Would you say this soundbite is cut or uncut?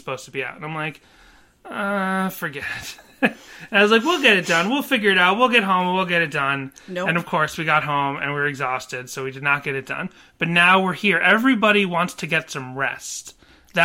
uncut